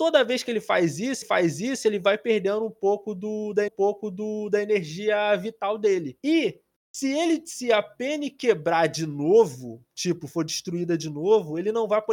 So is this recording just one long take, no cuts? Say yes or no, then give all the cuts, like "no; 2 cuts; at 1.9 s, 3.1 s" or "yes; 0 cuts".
no; 2 cuts; at 1.2 s, 3.7 s